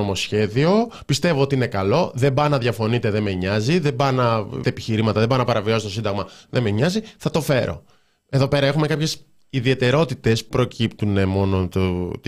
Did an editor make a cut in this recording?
yes; 2 cuts; at 4.6 s, 10.5 s

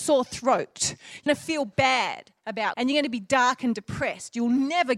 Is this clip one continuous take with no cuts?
no; 2 cuts; at 1.3 s, 2.7 s

